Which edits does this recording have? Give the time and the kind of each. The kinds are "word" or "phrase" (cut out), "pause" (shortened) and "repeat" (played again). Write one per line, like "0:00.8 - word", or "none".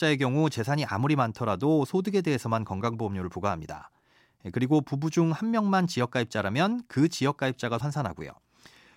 0:07.8 - phrase

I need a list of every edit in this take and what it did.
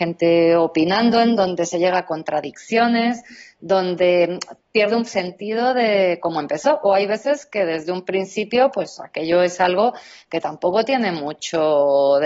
0:05.1 - phrase

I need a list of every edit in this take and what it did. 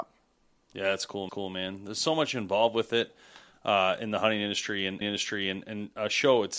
0:01.3 - repeat
0:05.0 - repeat

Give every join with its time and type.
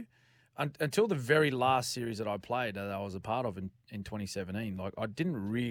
none

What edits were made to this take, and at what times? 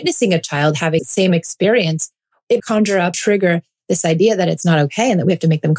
0:01.0 - word
0:02.6 - word
0:03.1 - word

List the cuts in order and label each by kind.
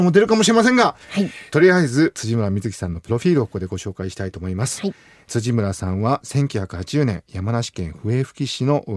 none

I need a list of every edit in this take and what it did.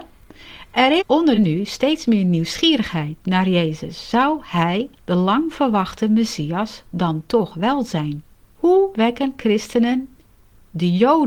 0:01.0 - word
0:01.3 - phrase
0:04.9 - pause
0:08.5 - pause

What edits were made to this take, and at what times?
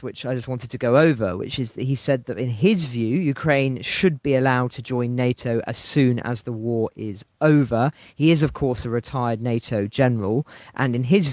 none

